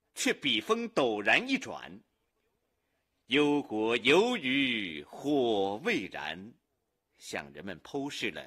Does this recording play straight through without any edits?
no; 1 cut; at 6.6 s

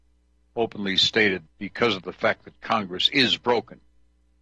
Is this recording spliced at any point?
yes; 1 cut; at 1.5 s

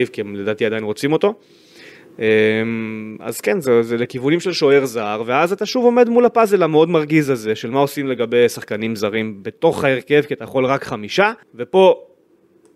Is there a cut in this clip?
yes; 1 cut; at 11.4 s

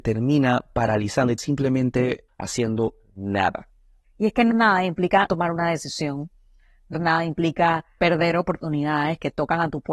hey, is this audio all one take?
no; 5 cuts; at 1.4 s, 4.5 s, 5.3 s, 6.9 s, 8.0 s

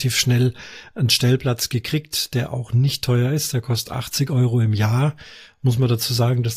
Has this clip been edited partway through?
no; 0 cuts

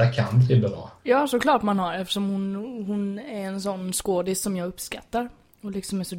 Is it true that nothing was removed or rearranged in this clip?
no; 1 cut; at 1.0 s

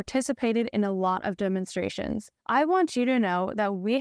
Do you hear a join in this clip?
yes; 1 cut; at 2.4 s

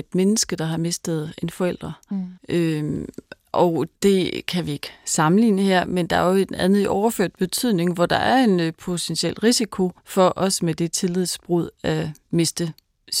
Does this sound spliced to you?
yes; 3 cuts; at 2.4 s, 3.9 s, 10.0 s

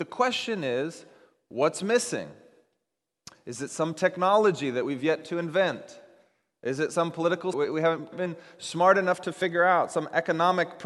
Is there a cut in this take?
yes; 2 cuts; at 7.5 s, 8.1 s

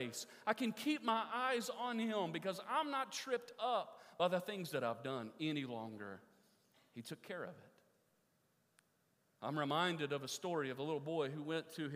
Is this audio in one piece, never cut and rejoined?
yes; 0 cuts

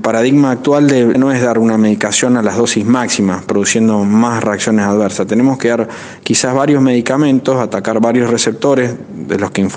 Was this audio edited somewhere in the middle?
yes; 1 cut; at 1.1 s

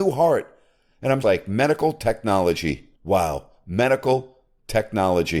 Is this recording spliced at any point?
yes; 2 cuts; at 1.2 s, 2.9 s

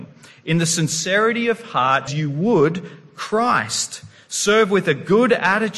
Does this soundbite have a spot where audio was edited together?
yes; 1 cut; at 2.1 s

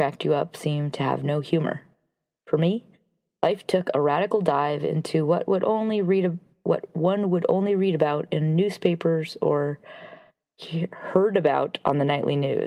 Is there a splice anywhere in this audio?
no; 0 cuts

